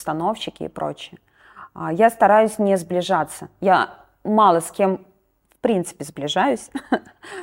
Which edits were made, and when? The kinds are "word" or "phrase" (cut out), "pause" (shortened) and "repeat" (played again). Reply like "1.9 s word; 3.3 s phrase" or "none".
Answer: none